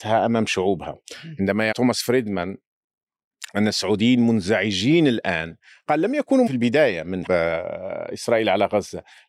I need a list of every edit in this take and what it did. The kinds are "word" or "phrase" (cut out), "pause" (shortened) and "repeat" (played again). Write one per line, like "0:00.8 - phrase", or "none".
0:01.7 - word
0:06.5 - word
0:07.3 - word